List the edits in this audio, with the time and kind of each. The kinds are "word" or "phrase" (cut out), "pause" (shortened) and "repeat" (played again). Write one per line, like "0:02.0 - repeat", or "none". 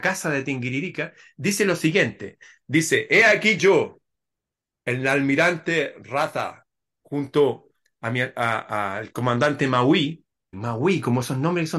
0:03.6 - word
0:10.5 - word